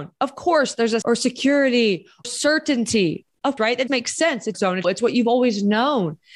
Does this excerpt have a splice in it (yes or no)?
yes